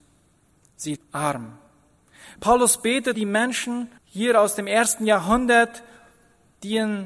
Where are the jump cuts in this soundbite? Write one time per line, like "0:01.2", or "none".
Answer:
0:01.0
0:03.1
0:04.0